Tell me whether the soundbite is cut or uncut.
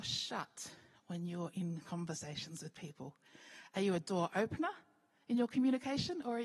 uncut